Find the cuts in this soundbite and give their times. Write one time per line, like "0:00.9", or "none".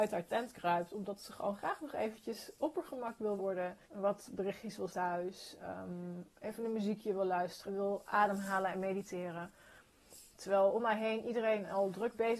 0:03.4
0:03.8
0:04.9
0:06.3
0:07.7